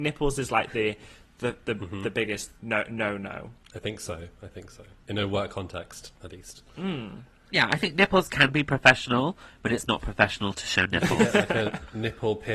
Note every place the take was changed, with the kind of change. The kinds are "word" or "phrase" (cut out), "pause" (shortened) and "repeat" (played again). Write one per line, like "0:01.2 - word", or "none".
none